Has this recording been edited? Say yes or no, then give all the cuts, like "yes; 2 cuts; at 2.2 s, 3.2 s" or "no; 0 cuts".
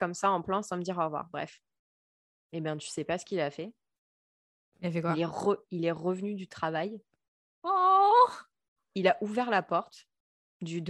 no; 0 cuts